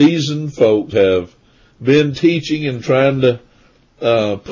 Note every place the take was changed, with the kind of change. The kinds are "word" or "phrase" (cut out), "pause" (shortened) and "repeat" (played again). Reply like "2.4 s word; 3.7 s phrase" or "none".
0.9 s word